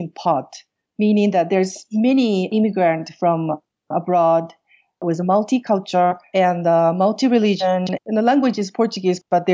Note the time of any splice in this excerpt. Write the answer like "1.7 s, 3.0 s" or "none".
none